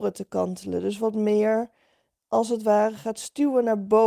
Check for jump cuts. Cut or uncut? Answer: uncut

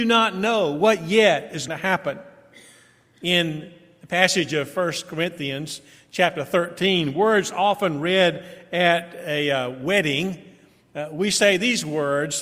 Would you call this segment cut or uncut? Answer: cut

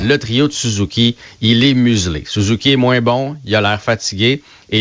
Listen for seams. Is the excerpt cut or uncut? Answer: uncut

